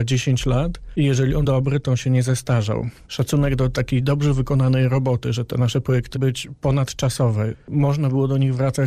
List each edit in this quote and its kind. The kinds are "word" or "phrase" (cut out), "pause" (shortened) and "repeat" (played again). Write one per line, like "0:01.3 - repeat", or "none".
0:01.4 - word
0:06.1 - word